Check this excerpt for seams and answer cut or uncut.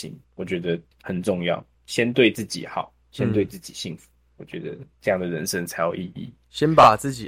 cut